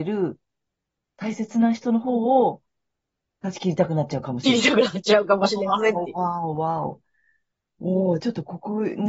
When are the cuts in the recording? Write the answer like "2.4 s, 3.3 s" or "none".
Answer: none